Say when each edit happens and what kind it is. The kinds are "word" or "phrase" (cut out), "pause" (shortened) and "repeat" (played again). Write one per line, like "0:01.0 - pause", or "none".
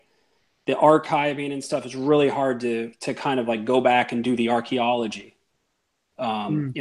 none

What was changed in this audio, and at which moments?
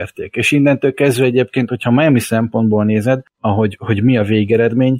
none

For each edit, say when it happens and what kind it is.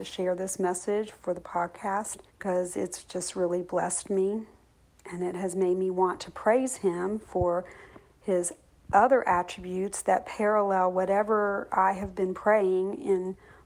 0:02.3 - pause

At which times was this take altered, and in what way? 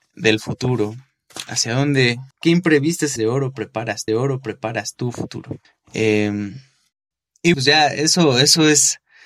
0:02.3 - pause
0:03.2 - word
0:04.1 - repeat
0:05.6 - pause
0:07.5 - word

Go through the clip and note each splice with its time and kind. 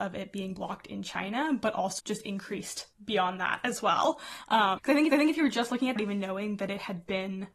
0:02.0 - word
0:02.9 - pause
0:04.8 - word
0:05.1 - repeat
0:06.0 - phrase

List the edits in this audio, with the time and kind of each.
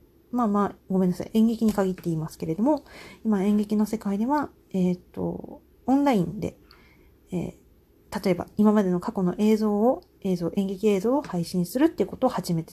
none

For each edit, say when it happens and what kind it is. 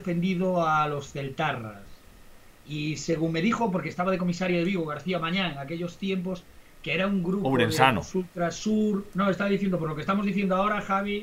none

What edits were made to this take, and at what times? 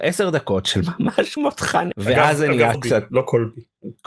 0:01.4 - word
0:01.9 - word
0:02.7 - word

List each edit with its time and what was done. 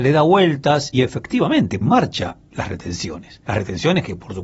0:00.9 - word
0:01.8 - word

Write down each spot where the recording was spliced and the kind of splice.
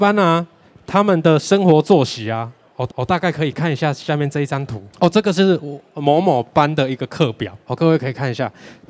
0:02.9 - repeat
0:04.9 - pause
0:07.6 - pause

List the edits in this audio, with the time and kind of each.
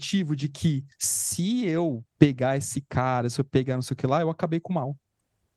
0:00.9 - pause
0:02.1 - pause

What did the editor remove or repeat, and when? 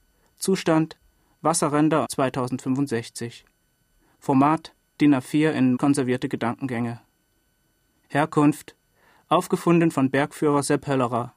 0:02.0 - phrase
0:05.0 - word
0:05.7 - phrase

